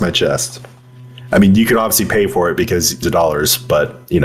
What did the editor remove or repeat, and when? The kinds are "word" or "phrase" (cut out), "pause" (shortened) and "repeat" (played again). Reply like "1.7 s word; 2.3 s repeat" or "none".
3.0 s phrase